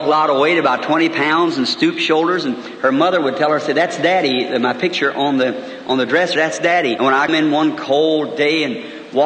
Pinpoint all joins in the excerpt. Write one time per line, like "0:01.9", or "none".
0:06.4
0:07.0
0:07.3